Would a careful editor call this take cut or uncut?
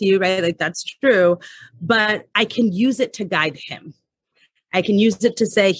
uncut